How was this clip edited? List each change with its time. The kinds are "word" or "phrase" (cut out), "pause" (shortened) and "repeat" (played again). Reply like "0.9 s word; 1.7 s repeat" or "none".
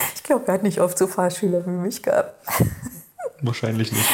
none